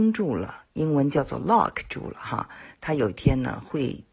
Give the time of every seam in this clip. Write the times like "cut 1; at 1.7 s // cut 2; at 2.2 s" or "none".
none